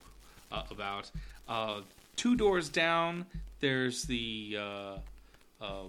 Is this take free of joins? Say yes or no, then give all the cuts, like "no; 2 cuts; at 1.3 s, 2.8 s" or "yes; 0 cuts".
yes; 0 cuts